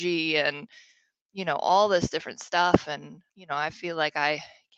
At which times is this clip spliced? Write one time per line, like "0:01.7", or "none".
0:03.3